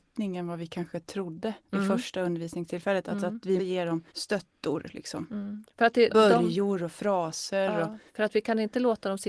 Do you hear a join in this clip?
yes; 5 cuts; at 1.6 s, 3.6 s, 4.1 s, 6.1 s, 8.1 s

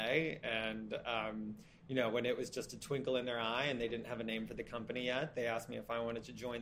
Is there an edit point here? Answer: no; 0 cuts

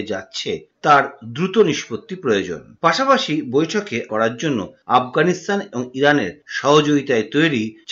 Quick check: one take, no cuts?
no; 1 cut; at 4.1 s

